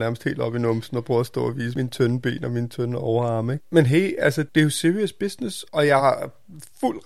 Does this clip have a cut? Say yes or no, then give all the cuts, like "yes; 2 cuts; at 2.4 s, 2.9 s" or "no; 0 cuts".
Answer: no; 0 cuts